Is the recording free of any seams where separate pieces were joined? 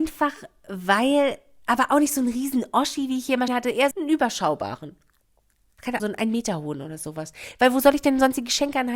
no; 3 cuts; at 3.5 s, 3.9 s, 6.0 s

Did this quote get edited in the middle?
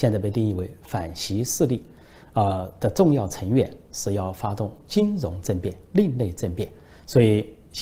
no; 0 cuts

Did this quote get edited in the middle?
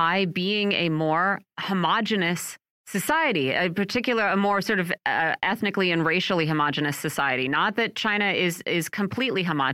no; 0 cuts

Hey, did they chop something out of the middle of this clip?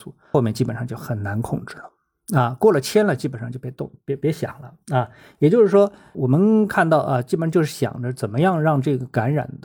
no; 0 cuts

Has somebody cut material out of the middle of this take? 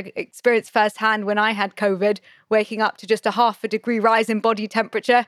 no; 0 cuts

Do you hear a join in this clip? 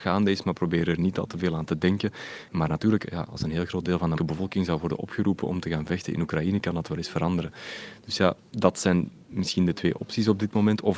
yes; 1 cut; at 4.2 s

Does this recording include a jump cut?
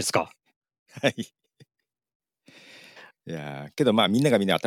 no; 0 cuts

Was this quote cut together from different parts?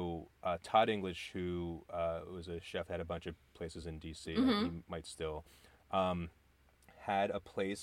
no; 0 cuts

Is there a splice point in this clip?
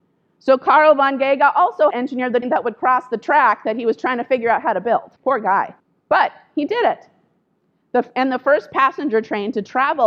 yes; 4 cuts; at 1.9 s, 2.4 s, 5.2 s, 5.8 s

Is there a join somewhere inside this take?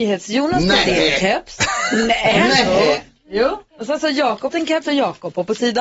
yes; 3 cuts; at 3.7 s, 4.5 s, 4.8 s

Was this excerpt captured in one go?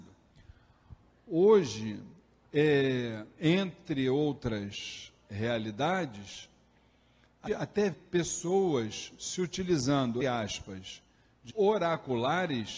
no; 4 cuts; at 7.5 s, 7.9 s, 10.2 s, 11.5 s

